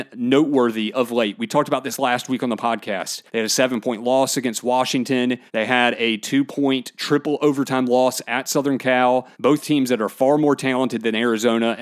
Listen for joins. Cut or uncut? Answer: cut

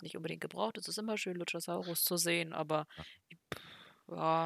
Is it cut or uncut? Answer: uncut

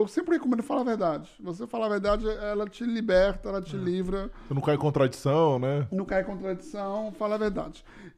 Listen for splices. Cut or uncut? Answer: uncut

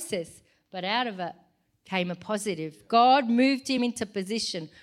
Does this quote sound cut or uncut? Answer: uncut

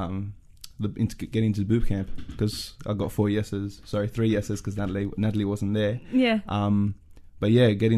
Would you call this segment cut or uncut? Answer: uncut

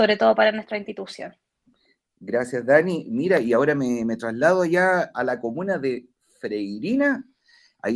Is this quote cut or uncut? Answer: uncut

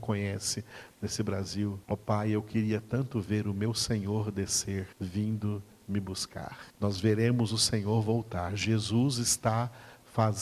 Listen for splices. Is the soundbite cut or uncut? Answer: cut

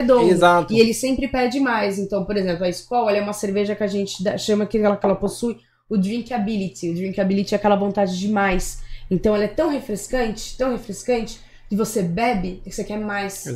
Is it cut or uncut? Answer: uncut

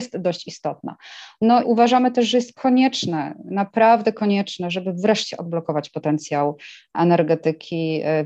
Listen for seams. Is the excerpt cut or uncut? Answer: cut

